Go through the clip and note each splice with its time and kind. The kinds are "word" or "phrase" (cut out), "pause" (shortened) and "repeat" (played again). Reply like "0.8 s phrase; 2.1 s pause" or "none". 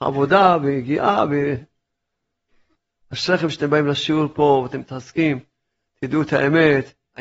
none